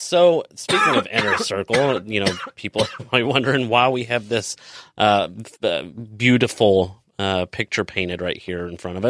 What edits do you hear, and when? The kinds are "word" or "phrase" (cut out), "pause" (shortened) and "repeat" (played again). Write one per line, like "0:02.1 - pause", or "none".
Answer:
0:05.5 - pause